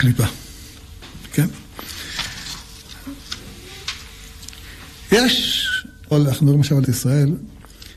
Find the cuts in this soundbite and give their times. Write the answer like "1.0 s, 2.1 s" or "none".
6.1 s, 6.8 s